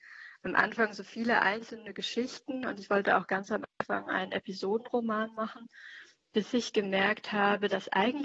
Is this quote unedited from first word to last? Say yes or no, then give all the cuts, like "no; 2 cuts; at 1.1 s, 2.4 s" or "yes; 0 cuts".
yes; 0 cuts